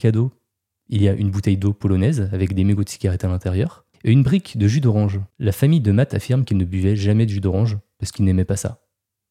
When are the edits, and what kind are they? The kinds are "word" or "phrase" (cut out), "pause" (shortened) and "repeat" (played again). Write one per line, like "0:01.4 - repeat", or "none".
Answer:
0:03.9 - pause
0:05.3 - pause